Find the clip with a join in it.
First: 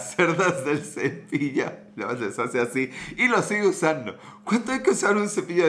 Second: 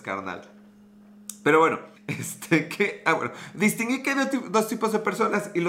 second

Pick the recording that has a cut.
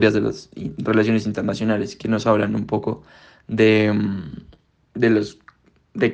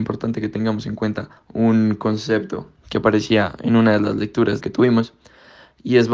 second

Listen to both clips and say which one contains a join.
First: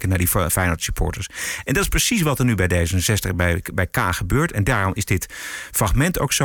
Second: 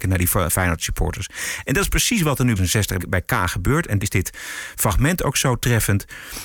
second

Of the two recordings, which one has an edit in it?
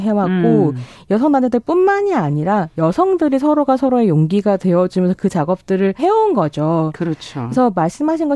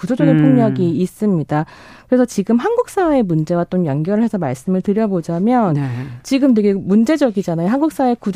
first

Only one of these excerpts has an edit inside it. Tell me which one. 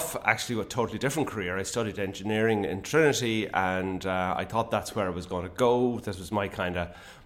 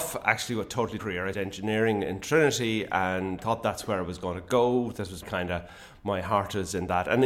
second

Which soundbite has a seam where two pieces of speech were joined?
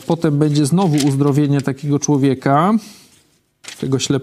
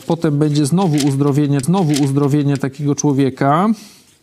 second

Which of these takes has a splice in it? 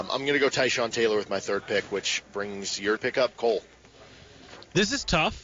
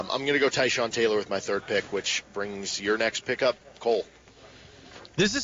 first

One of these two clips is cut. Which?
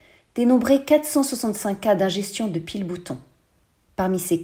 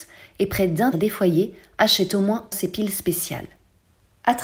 second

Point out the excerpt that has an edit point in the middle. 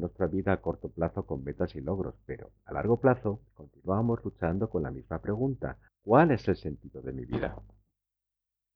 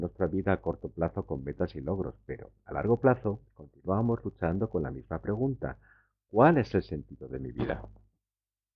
first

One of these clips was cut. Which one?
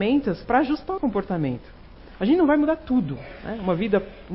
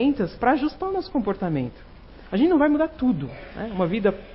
first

